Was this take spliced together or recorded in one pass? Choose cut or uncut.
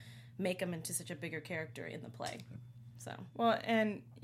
uncut